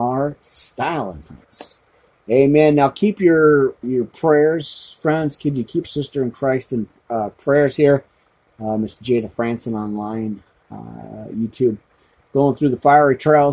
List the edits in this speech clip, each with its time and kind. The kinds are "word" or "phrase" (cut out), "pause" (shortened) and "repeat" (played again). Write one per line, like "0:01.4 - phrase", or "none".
0:03.8 - word
0:05.8 - phrase